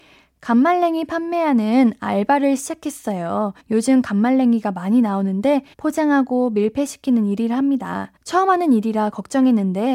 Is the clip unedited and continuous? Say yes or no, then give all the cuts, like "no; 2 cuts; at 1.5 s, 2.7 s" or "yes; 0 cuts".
no; 3 cuts; at 3.6 s, 5.7 s, 8.2 s